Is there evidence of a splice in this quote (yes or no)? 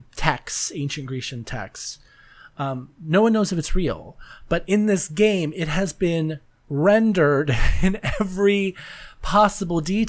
no